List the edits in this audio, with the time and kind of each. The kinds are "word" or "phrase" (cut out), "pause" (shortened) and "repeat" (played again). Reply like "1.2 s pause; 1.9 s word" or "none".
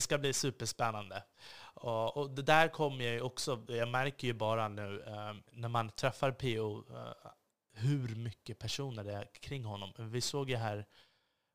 5.5 s pause